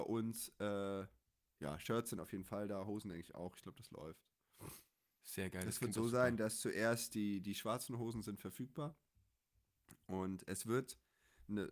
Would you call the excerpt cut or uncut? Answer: uncut